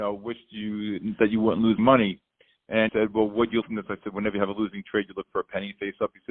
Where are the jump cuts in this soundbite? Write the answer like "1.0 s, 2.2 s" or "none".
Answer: 1.8 s, 2.9 s, 3.6 s